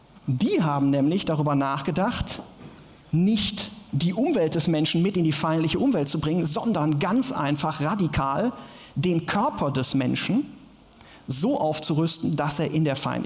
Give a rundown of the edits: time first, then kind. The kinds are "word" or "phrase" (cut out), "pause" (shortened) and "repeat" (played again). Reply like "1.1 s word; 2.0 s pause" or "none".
none